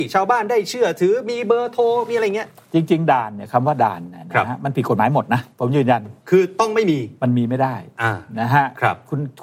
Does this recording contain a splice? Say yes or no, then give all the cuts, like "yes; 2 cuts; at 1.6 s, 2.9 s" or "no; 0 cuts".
yes; 3 cuts; at 5.5 s, 6.2 s, 7.2 s